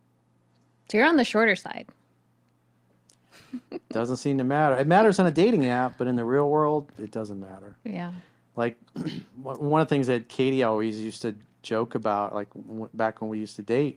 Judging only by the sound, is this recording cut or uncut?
uncut